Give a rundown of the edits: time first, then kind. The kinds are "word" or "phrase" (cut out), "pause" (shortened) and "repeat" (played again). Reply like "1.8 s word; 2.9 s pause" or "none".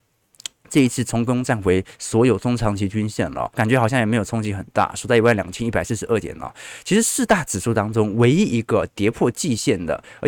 3.5 s word

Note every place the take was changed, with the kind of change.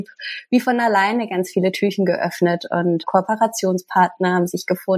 none

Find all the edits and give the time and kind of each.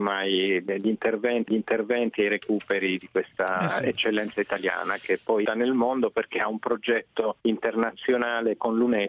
1.5 s repeat; 5.4 s phrase; 7.4 s pause

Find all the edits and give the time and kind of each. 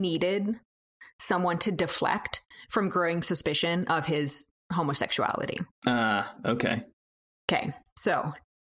none

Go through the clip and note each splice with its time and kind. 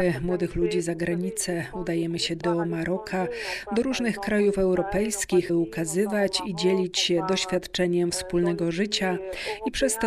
2.4 s phrase; 5.5 s word

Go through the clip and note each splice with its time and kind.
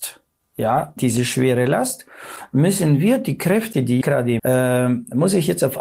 1.0 s word; 4.0 s word; 4.4 s phrase

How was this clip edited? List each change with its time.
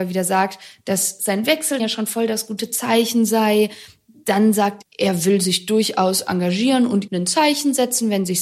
1.8 s word; 4.8 s word; 7.1 s word

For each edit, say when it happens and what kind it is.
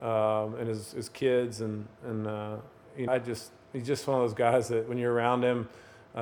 3.1 s word

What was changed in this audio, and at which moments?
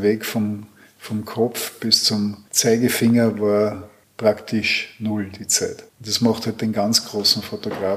2.5 s pause; 4.0 s pause; 5.9 s pause

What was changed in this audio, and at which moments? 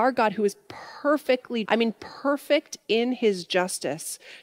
1.7 s word

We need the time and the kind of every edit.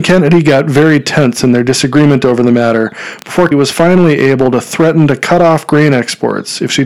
3.5 s word

